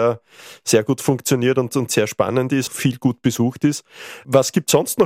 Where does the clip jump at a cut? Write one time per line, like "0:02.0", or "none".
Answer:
0:02.7